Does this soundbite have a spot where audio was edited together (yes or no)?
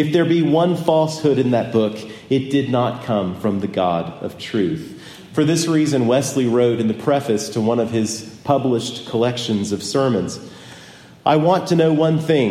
no